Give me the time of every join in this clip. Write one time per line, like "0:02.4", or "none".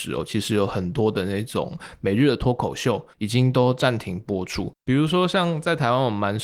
0:03.1
0:04.8